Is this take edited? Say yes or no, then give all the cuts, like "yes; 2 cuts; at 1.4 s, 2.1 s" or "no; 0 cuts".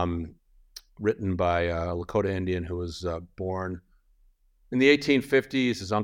no; 0 cuts